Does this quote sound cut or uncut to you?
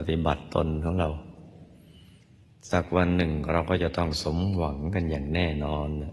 uncut